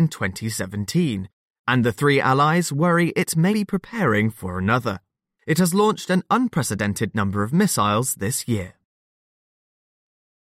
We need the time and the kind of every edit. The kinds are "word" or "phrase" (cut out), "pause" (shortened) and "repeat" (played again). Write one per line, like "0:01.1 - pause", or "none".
0:03.5 - word